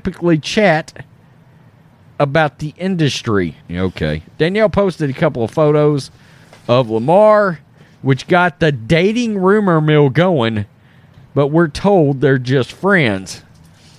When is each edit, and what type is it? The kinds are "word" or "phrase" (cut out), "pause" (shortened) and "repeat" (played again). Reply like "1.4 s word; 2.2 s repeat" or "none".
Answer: 3.6 s pause